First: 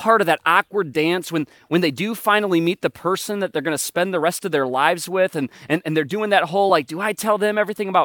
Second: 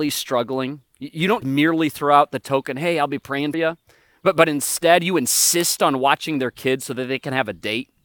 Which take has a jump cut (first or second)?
second